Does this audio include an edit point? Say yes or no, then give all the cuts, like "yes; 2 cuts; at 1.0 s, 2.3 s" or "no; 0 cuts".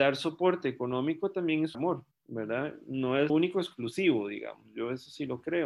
yes; 3 cuts; at 1.7 s, 2.1 s, 3.3 s